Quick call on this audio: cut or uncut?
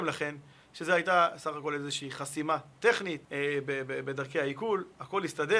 cut